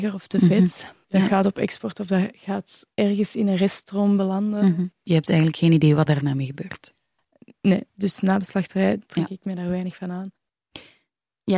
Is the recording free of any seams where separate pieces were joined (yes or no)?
no